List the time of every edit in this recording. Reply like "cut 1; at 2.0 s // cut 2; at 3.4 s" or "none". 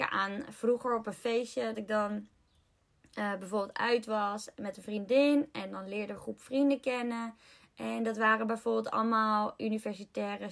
cut 1; at 1.7 s // cut 2; at 6.2 s